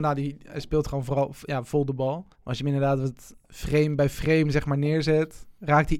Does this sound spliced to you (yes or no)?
yes